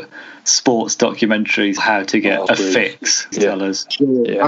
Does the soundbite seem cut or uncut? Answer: cut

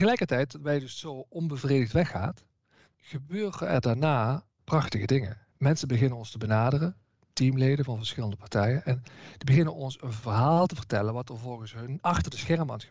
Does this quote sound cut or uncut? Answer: uncut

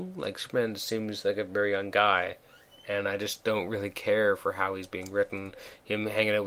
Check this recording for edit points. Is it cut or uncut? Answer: uncut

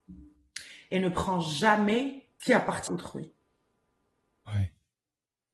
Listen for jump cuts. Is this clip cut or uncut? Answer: cut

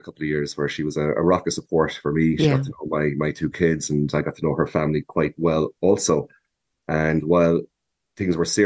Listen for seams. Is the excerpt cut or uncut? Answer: uncut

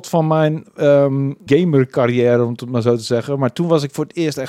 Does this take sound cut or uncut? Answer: cut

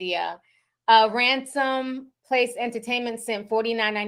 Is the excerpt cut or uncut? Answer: uncut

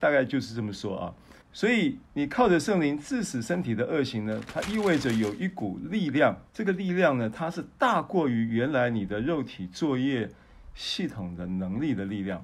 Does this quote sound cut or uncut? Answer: cut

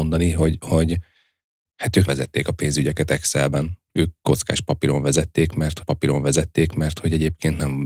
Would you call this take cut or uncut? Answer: cut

